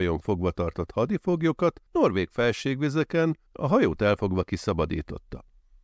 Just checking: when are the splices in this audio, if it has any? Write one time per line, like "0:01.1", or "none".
0:01.9
0:03.5